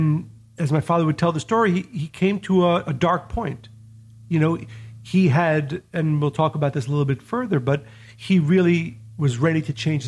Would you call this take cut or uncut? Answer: uncut